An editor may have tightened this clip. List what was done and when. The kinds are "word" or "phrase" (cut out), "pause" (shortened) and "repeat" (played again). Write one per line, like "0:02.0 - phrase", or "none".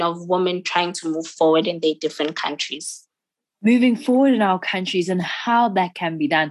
none